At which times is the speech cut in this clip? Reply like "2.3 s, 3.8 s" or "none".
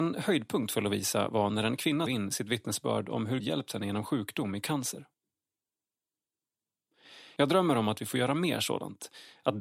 2.1 s, 3.4 s